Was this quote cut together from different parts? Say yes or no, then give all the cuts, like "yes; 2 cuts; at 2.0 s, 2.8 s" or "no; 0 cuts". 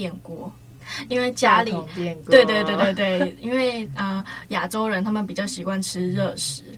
no; 0 cuts